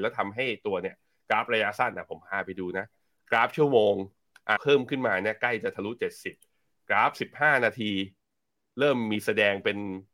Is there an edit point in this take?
yes; 1 cut; at 4.6 s

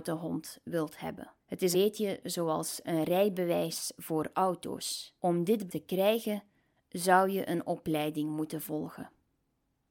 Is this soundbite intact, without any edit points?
no; 4 cuts; at 1.4 s, 1.7 s, 5.2 s, 5.7 s

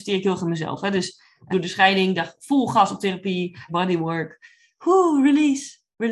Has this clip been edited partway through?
yes; 2 cuts; at 1.5 s, 3.7 s

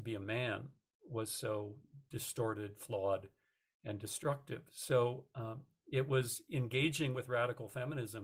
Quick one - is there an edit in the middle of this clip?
no; 0 cuts

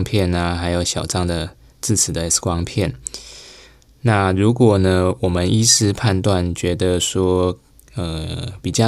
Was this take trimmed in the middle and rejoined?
no; 0 cuts

